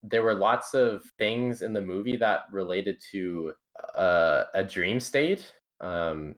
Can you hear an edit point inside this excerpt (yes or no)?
yes